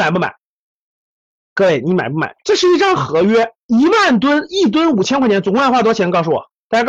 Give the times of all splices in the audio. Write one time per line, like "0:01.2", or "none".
0:02.4
0:03.6

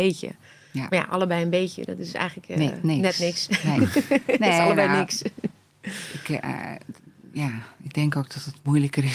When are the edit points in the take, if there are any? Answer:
none

